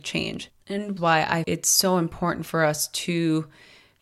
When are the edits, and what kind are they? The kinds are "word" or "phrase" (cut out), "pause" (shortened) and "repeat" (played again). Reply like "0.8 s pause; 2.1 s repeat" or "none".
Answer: 1.0 s phrase; 1.4 s word